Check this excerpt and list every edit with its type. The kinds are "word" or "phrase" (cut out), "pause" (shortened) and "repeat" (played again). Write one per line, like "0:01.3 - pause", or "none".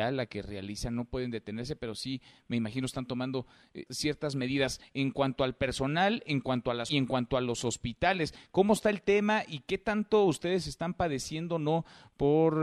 0:03.9 - word
0:06.9 - phrase